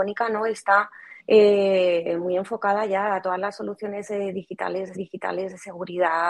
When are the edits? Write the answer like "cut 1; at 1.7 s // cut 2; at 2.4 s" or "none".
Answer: cut 1; at 1.2 s // cut 2; at 4.9 s